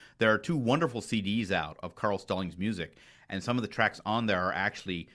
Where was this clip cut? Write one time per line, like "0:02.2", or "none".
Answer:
none